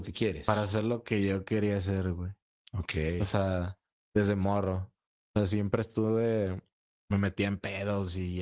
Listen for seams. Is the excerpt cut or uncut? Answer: uncut